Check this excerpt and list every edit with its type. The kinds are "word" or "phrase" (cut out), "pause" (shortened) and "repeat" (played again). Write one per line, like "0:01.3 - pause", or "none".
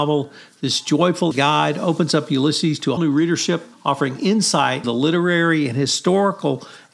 0:01.3 - word
0:03.0 - word
0:03.7 - pause
0:04.8 - word